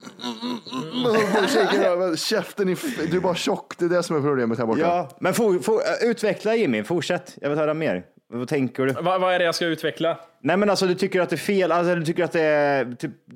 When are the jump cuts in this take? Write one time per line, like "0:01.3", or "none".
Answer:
none